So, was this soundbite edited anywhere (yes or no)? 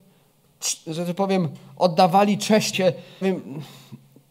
yes